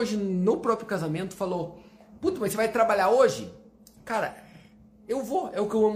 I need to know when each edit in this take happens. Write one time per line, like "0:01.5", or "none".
none